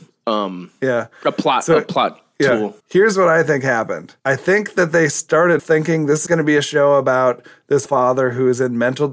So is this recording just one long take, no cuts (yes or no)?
no